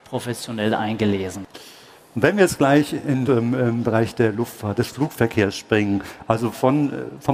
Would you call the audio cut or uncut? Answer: cut